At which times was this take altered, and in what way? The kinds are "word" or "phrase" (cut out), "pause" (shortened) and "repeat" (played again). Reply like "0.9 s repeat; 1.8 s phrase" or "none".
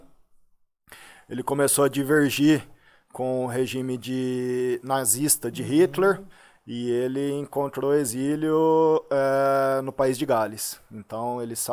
none